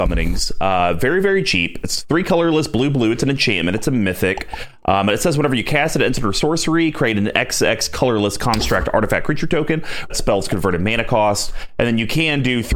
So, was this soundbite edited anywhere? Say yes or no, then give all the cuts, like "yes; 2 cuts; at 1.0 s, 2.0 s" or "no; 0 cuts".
yes; 1 cut; at 10.1 s